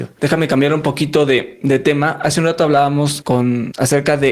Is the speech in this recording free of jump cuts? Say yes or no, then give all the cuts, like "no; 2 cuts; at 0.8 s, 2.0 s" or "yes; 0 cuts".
yes; 0 cuts